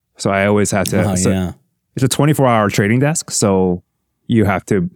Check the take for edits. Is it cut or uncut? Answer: uncut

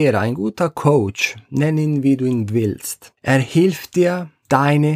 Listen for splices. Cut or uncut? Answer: uncut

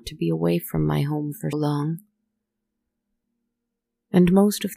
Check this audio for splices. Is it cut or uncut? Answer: cut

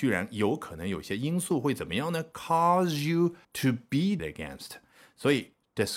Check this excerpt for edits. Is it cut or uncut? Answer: cut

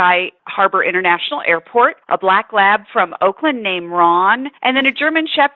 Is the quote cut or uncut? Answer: cut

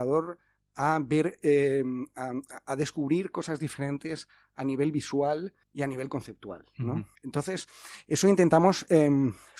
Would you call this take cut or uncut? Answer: cut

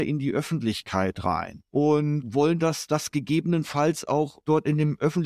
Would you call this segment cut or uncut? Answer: uncut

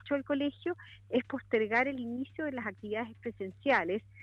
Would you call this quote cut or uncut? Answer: uncut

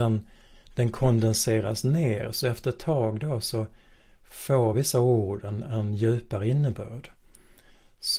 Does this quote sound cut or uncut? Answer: uncut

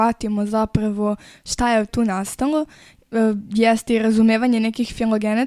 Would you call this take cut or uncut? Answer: cut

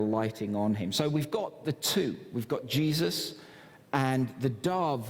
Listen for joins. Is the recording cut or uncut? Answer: uncut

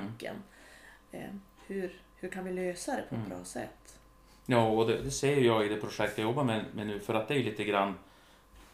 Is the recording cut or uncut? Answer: uncut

